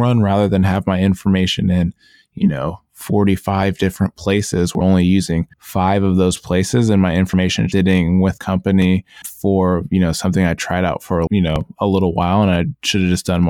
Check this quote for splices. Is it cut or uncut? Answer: cut